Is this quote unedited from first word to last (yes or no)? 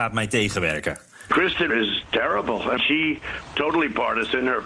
no